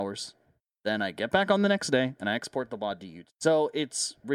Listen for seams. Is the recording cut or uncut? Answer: cut